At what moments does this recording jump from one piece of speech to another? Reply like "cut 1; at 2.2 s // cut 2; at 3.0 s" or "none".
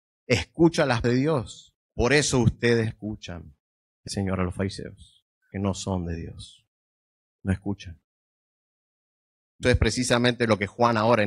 cut 1; at 1.0 s // cut 2; at 1.8 s // cut 3; at 2.9 s // cut 4; at 4.1 s // cut 5; at 5.5 s // cut 6; at 9.6 s